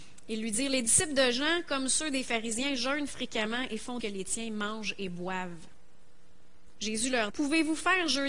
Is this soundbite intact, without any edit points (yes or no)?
no